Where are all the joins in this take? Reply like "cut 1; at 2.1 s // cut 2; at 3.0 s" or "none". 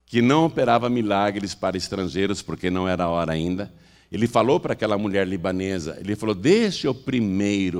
none